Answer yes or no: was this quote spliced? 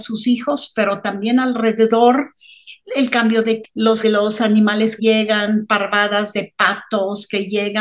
yes